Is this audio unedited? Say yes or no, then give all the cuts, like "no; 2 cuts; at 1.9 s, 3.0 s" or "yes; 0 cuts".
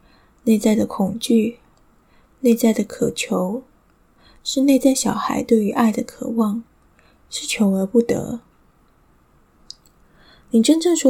yes; 0 cuts